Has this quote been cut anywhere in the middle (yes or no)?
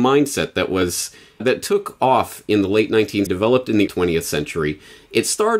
yes